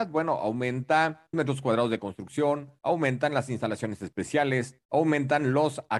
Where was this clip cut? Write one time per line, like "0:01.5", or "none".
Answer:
0:01.3
0:02.8
0:04.8